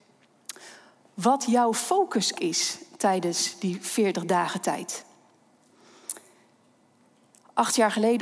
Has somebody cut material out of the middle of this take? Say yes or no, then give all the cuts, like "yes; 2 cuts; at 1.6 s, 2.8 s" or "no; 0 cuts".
yes; 1 cut; at 2.3 s